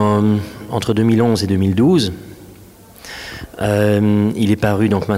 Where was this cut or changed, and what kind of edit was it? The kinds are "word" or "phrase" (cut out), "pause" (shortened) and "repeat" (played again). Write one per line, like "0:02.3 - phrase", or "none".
none